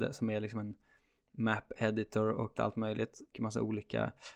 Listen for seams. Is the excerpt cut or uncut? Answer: cut